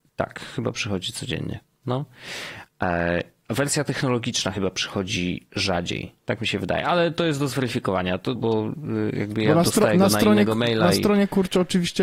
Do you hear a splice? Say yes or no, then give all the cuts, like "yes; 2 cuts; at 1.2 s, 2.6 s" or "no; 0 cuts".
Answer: yes; 1 cut; at 8.4 s